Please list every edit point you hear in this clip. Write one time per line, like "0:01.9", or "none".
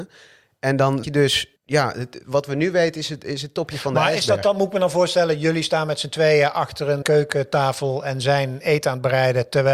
0:01.0
0:01.6
0:07.0